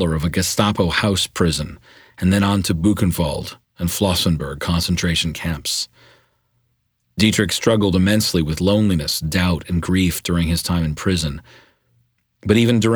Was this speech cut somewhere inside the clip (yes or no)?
no